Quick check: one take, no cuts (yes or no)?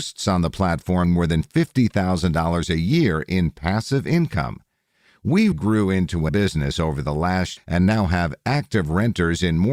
no